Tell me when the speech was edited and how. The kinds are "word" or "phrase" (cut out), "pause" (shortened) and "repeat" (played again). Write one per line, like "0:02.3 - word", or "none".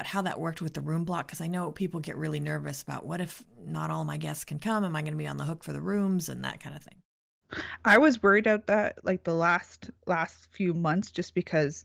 0:10.0 - pause